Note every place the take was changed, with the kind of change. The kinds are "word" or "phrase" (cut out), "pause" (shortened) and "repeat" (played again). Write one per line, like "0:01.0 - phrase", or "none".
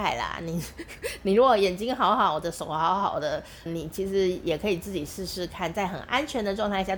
0:03.7 - word